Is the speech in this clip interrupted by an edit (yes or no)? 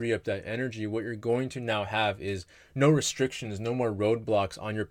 no